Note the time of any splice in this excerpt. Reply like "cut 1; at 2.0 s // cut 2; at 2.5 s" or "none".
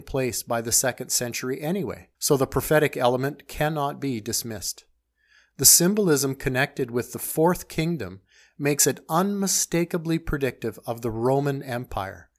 cut 1; at 2.1 s